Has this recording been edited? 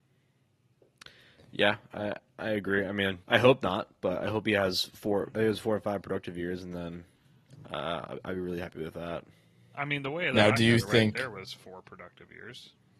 yes; 1 cut; at 3.2 s

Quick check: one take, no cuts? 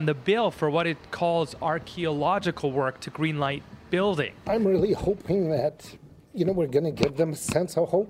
yes; 0 cuts

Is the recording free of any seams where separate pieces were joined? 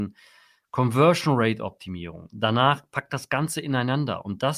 yes; 0 cuts

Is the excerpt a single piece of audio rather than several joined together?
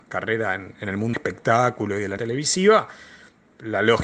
no; 2 cuts; at 1.1 s, 2.2 s

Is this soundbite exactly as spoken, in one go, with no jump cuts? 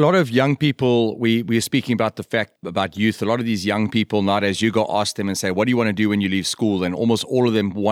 no; 1 cut; at 2.6 s

